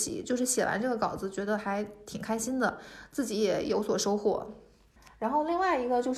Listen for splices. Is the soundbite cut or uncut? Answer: uncut